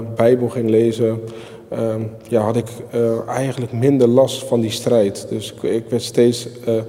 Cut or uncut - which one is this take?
uncut